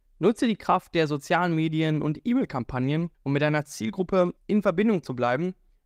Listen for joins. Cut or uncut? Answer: cut